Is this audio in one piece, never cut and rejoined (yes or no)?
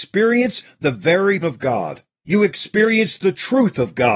no